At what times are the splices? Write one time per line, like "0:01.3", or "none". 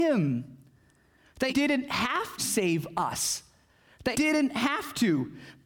0:01.5
0:02.4
0:04.1